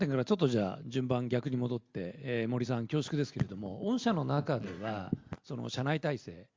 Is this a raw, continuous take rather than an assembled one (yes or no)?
yes